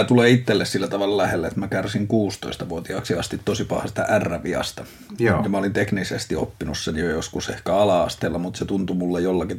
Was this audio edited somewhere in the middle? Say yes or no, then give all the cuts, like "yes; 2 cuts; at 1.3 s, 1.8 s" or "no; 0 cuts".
no; 0 cuts